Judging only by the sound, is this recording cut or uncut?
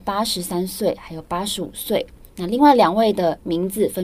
cut